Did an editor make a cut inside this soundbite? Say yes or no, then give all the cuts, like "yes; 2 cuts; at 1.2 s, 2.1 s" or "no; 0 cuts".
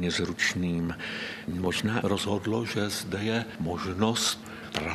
no; 0 cuts